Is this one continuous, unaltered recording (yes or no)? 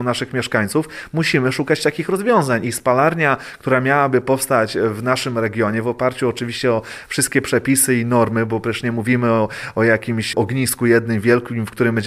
yes